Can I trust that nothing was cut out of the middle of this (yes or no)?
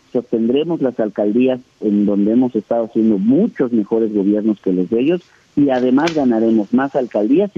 yes